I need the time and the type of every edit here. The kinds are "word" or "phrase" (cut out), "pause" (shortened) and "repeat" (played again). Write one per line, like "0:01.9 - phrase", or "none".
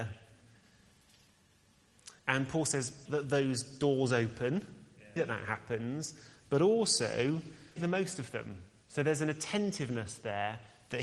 0:02.2 - pause
0:03.1 - word
0:05.2 - word
0:07.8 - word